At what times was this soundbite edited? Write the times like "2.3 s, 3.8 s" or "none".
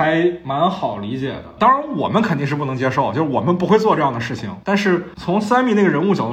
none